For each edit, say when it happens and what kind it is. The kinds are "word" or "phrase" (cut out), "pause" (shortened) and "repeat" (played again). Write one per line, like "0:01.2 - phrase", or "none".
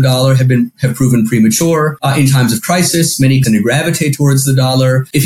0:03.4 - word